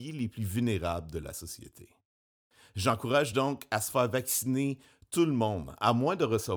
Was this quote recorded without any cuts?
yes; 0 cuts

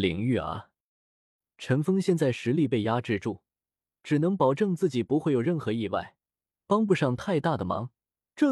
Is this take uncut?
yes; 0 cuts

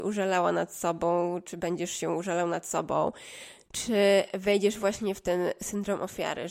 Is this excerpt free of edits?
yes; 0 cuts

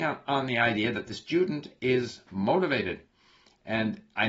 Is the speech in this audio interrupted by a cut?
no; 0 cuts

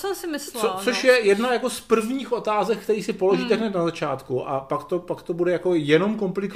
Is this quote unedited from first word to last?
yes; 0 cuts

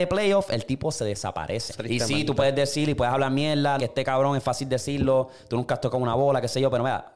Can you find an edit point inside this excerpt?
yes; 2 cuts; at 1.8 s, 3.8 s

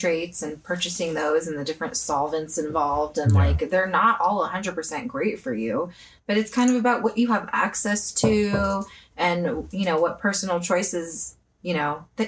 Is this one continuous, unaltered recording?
yes; 0 cuts

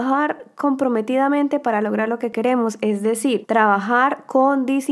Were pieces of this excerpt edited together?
no; 0 cuts

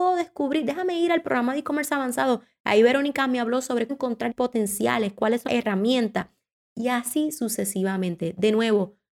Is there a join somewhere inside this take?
yes; 3 cuts; at 3.9 s, 4.3 s, 5.5 s

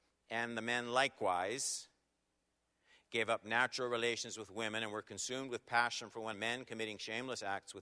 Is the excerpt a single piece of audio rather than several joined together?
no; 1 cut; at 6.3 s

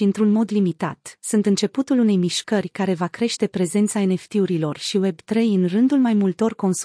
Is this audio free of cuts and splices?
yes; 0 cuts

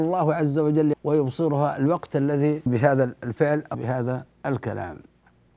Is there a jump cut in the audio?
yes; 3 cuts; at 0.9 s, 2.7 s, 3.7 s

